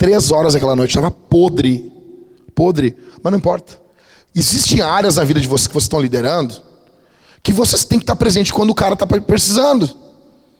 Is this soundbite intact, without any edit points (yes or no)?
yes